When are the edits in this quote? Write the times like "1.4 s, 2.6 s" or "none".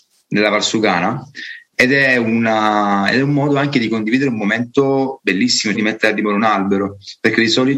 1.7 s, 5.7 s